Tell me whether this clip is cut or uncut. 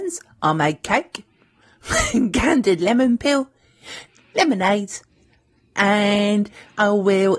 uncut